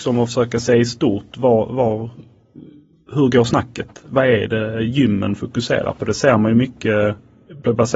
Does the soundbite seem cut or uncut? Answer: uncut